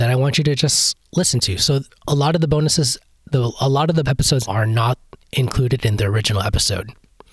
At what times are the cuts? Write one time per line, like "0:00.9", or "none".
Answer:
0:04.0
0:04.5